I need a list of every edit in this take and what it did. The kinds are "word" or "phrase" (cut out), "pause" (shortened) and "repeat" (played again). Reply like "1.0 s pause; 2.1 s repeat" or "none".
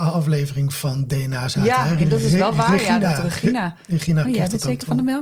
none